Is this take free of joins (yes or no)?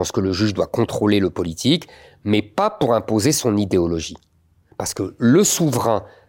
yes